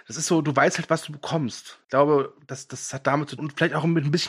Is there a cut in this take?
yes; 2 cuts; at 1.8 s, 3.4 s

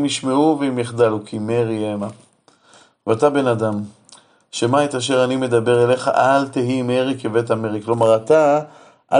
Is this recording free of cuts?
yes; 0 cuts

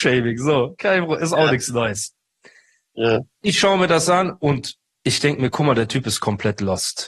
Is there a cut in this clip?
no; 0 cuts

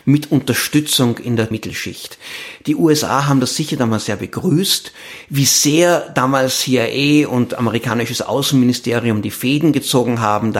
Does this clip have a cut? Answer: yes; 1 cut; at 1.5 s

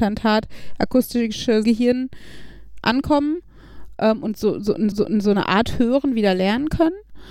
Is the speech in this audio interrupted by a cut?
yes; 2 cuts; at 1.6 s, 4.9 s

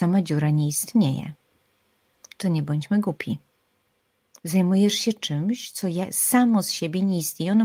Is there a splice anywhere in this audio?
no; 0 cuts

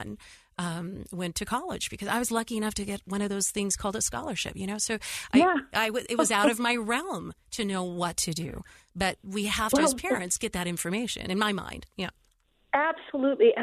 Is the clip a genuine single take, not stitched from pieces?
yes; 0 cuts

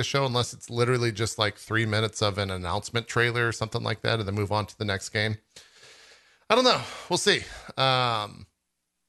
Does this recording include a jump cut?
no; 0 cuts

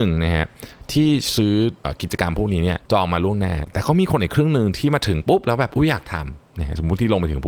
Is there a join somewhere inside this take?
yes; 2 cuts; at 1.8 s, 2.9 s

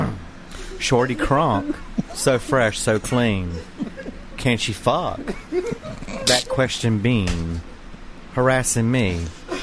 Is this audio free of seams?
yes; 0 cuts

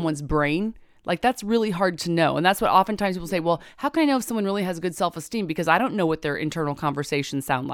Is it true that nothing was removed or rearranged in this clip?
yes; 0 cuts

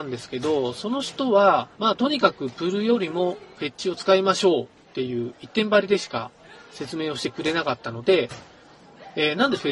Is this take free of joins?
no; 1 cut; at 1.7 s

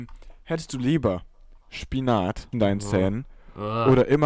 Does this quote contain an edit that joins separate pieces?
yes; 2 cuts; at 1.6 s, 2.5 s

